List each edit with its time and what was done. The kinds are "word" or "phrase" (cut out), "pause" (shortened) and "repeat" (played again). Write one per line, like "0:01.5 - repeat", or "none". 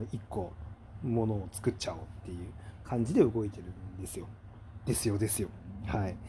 0:02.8 - phrase